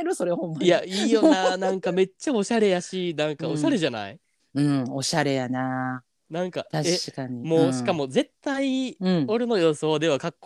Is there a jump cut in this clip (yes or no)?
yes